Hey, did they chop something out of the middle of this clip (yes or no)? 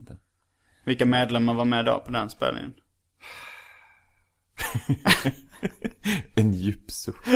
no